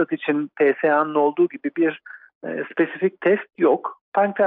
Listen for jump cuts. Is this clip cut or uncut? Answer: uncut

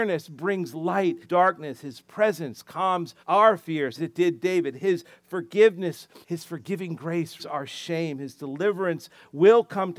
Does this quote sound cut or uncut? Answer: cut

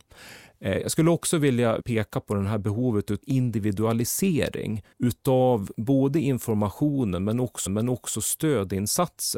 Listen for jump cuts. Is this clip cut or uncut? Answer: cut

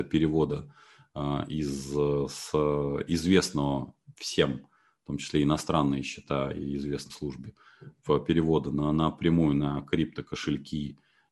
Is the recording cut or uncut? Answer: cut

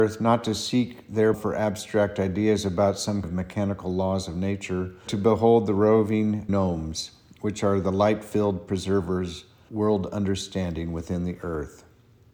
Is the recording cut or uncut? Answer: cut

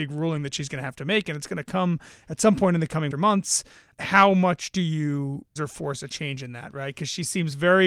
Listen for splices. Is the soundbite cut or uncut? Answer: cut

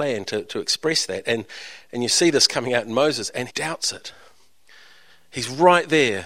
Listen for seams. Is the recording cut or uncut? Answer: cut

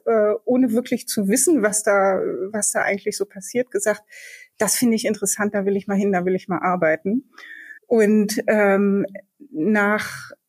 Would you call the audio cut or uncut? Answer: cut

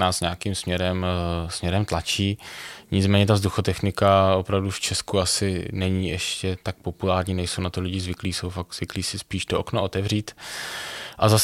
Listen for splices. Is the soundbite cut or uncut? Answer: uncut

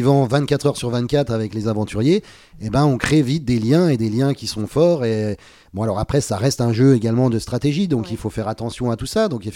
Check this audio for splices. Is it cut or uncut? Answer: uncut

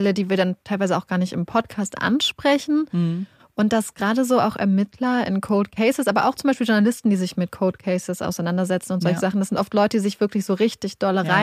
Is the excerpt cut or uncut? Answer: uncut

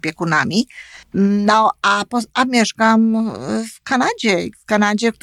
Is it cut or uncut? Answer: cut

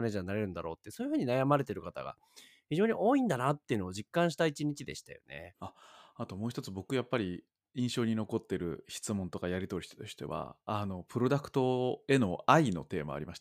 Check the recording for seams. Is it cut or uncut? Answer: uncut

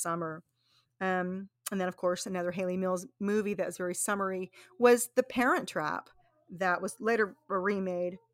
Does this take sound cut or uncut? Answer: uncut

